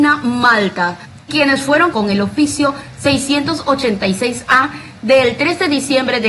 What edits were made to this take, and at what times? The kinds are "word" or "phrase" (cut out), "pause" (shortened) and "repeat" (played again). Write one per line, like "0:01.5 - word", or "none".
0:01.3 - word
0:01.9 - word